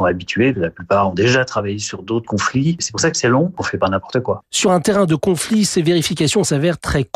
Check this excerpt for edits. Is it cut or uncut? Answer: uncut